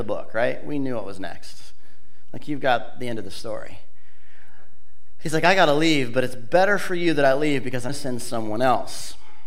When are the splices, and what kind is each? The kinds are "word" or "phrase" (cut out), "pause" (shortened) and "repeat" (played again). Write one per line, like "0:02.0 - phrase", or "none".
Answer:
0:07.9 - word